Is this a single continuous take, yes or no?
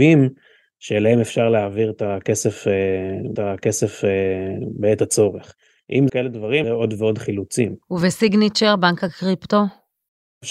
no